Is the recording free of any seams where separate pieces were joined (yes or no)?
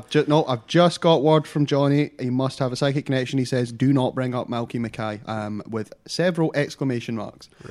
yes